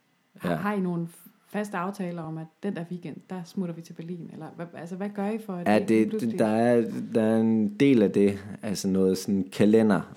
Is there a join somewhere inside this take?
no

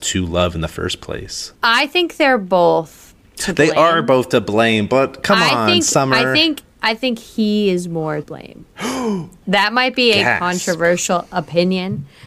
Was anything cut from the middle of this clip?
yes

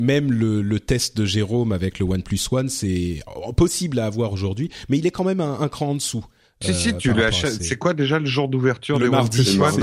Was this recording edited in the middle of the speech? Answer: no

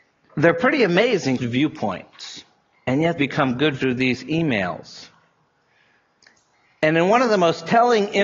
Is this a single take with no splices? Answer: no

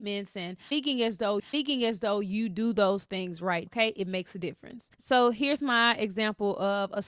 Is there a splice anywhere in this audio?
yes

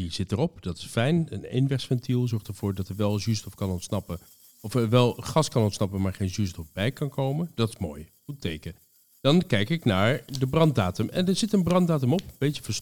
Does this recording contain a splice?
no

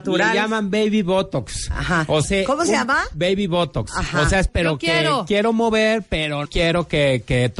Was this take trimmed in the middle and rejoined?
yes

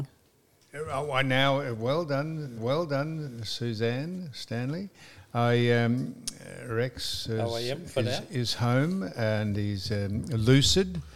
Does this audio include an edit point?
yes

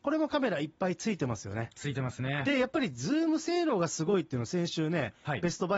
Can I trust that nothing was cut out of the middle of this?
yes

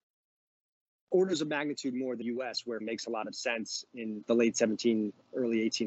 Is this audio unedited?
no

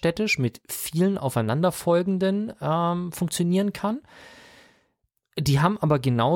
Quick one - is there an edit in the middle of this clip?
no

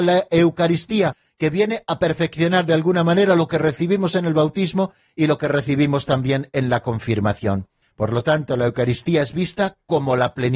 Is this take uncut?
yes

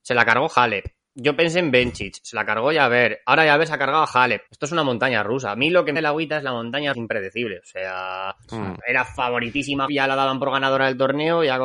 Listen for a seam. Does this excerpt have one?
yes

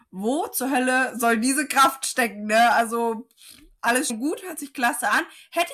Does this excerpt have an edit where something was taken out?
yes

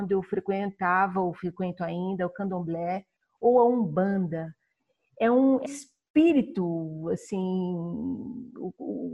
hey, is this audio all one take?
no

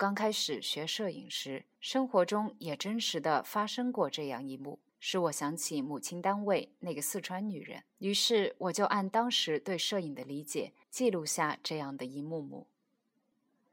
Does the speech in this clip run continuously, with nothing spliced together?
no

